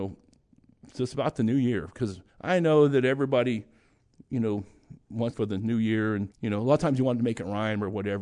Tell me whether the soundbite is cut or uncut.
cut